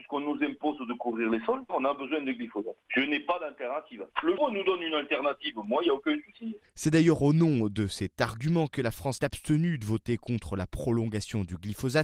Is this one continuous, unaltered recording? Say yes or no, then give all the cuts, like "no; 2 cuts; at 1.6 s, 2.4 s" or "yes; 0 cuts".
no; 2 cuts; at 4.4 s, 9.2 s